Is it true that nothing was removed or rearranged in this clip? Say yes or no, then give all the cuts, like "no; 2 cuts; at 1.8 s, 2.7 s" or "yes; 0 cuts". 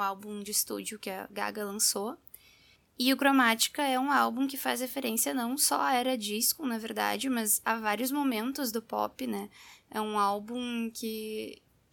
yes; 0 cuts